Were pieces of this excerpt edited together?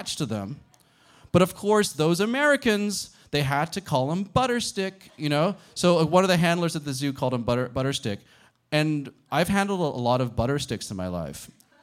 no; 0 cuts

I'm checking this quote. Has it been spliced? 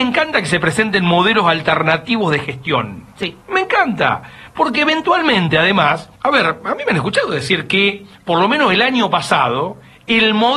yes; 2 cuts; at 3.4 s, 6.1 s

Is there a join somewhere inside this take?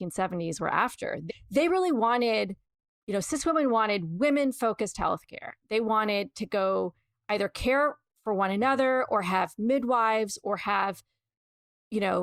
no; 0 cuts

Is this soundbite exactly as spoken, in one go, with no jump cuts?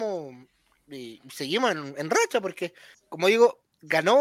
no; 1 cut; at 2.9 s

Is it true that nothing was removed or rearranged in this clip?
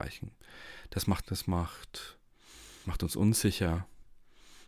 no; 2 cuts; at 1.2 s, 2.8 s

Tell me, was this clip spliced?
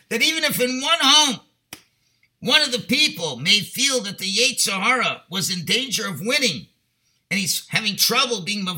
no; 0 cuts

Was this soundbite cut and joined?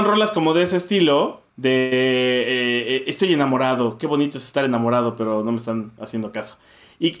yes; 1 cut; at 1.5 s

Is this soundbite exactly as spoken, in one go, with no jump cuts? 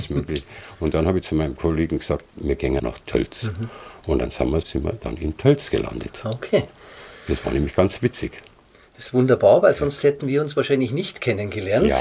no; 2 cuts; at 2.8 s, 4.6 s

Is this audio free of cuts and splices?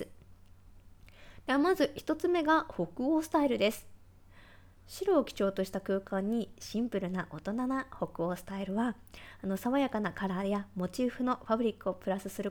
yes; 0 cuts

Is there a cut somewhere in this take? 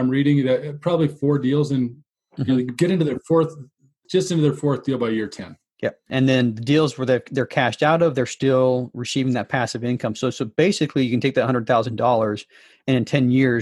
no; 0 cuts

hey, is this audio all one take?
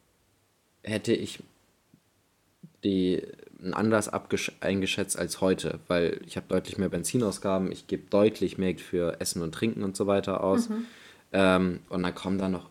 no; 2 cuts; at 3.7 s, 8.8 s

